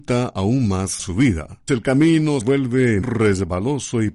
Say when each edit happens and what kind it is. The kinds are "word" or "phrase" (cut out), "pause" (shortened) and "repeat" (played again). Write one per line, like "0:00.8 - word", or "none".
0:01.0 - word
0:01.7 - word
0:02.4 - word
0:03.0 - word